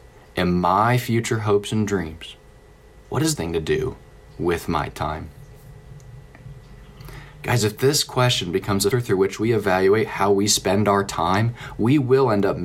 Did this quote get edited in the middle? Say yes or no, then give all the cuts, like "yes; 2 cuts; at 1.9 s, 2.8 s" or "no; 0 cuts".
yes; 2 cuts; at 3.4 s, 8.9 s